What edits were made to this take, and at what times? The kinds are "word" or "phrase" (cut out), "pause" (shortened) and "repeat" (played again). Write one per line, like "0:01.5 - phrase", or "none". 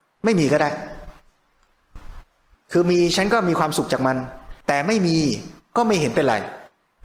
0:02.5 - pause
0:04.6 - pause